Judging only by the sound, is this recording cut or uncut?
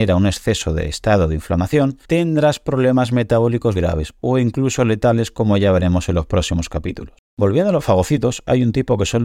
cut